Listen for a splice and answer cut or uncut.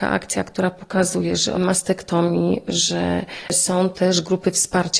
cut